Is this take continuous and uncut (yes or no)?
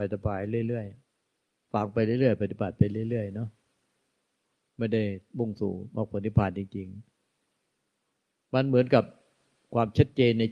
no